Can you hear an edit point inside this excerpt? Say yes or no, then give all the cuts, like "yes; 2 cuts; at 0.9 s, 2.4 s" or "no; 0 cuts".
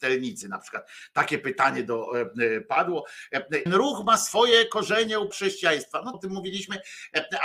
yes; 3 cuts; at 3.7 s, 5.3 s, 6.1 s